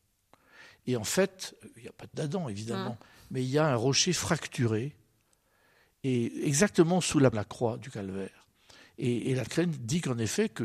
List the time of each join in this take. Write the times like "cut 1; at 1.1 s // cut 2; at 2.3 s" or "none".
cut 1; at 2.1 s // cut 2; at 7.3 s // cut 3; at 9.5 s